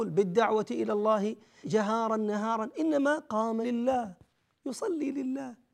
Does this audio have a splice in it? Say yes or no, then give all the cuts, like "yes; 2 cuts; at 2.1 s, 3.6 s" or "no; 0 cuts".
yes; 2 cuts; at 1.6 s, 3.6 s